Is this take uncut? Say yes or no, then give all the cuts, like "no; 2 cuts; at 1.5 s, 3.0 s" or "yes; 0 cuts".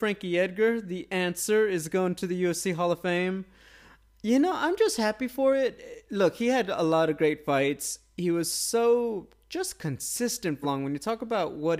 no; 1 cut; at 10.6 s